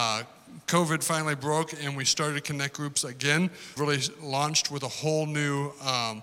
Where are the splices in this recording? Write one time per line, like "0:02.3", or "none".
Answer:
0:03.8